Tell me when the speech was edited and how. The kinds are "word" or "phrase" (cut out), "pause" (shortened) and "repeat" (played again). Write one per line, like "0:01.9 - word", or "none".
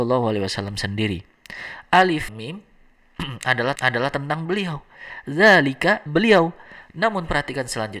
0:02.3 - word
0:03.7 - repeat
0:06.1 - phrase